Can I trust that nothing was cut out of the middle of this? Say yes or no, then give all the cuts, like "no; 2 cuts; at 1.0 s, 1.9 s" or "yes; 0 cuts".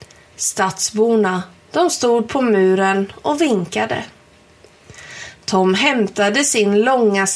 yes; 0 cuts